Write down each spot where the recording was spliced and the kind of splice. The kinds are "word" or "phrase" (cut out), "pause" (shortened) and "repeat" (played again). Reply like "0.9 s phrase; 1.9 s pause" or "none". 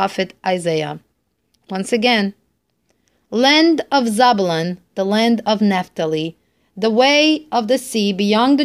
none